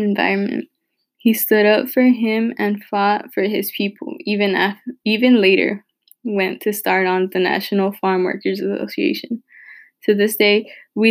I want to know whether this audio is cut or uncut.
uncut